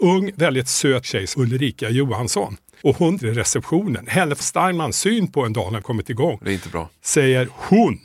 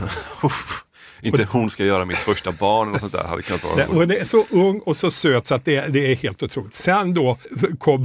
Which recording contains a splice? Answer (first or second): first